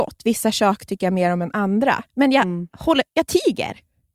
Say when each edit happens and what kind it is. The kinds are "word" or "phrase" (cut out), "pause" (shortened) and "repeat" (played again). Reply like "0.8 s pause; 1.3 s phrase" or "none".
2.1 s pause; 3.1 s pause